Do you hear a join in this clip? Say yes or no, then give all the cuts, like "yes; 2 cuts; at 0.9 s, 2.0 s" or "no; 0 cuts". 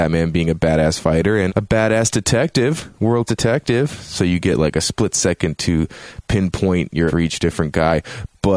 yes; 3 cuts; at 1.5 s, 3.3 s, 7.1 s